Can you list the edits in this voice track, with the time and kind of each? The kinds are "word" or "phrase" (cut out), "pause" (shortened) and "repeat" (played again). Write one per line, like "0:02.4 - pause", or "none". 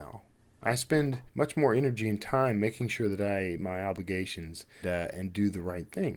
0:01.3 - pause
0:03.6 - word
0:04.8 - word